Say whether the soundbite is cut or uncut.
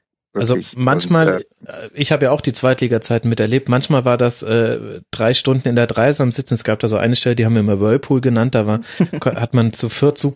uncut